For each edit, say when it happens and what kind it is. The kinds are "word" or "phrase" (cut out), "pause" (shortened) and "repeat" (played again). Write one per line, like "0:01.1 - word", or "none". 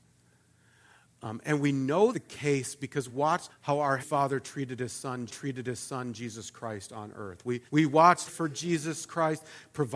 0:02.1 - word
0:03.1 - word
0:03.5 - word
0:04.0 - word
0:05.3 - repeat
0:07.7 - pause
0:08.3 - phrase